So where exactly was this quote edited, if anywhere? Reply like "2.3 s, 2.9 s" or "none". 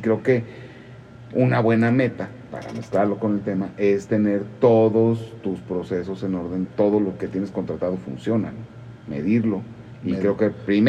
6.6 s

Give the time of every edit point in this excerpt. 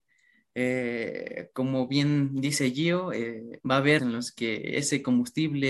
3.6 s, 4.0 s

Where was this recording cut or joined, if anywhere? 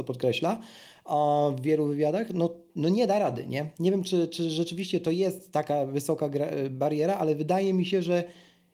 none

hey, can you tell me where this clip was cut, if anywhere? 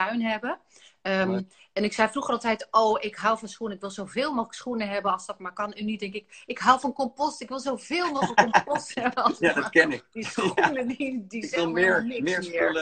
none

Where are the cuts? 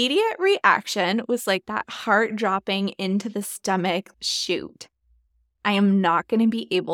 none

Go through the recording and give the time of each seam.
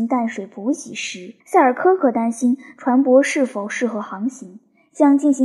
1.4 s

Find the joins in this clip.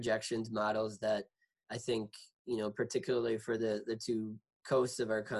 none

